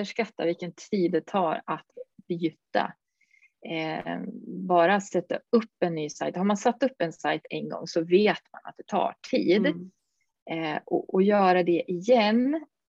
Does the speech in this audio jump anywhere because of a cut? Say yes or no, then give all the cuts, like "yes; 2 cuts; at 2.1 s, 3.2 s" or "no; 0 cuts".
no; 0 cuts